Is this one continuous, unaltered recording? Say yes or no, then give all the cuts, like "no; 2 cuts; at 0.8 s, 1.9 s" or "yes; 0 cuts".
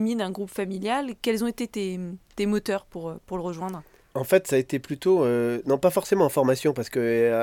no; 1 cut; at 4.0 s